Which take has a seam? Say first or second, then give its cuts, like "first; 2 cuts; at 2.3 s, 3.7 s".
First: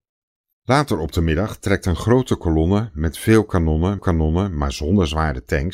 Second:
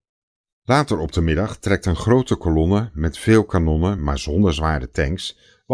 first; 1 cut; at 4.0 s